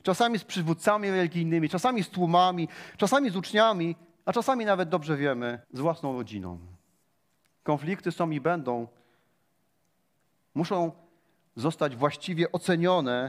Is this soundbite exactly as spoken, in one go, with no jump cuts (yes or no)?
no